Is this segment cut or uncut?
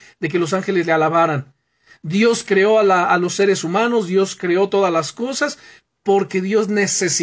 uncut